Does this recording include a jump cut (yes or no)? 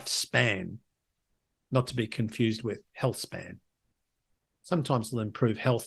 no